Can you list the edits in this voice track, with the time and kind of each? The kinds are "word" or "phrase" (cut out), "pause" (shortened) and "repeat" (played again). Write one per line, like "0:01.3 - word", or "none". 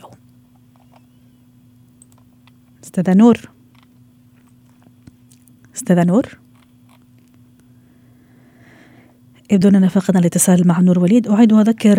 none